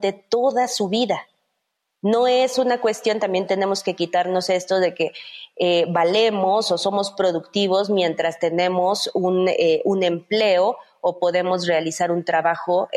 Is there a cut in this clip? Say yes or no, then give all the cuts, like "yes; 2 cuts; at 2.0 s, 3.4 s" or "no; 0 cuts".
no; 0 cuts